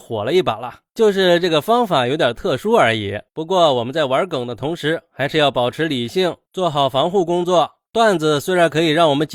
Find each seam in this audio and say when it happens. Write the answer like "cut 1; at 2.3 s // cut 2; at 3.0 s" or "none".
cut 1; at 3.3 s